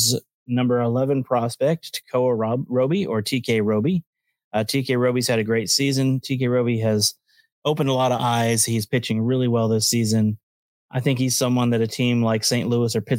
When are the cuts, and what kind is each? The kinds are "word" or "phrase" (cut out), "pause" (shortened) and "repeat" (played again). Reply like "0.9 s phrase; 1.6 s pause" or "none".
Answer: none